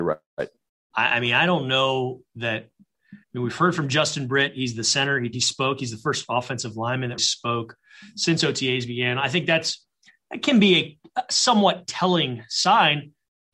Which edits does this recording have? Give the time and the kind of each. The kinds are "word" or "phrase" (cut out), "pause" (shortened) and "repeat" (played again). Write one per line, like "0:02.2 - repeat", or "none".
0:03.2 - pause
0:05.3 - word
0:07.2 - word